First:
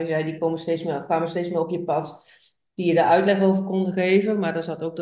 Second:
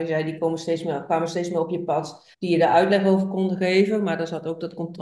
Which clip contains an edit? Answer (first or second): second